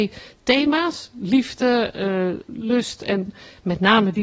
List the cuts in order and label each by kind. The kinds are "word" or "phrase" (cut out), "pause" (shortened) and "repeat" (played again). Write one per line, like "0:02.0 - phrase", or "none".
0:02.5 - word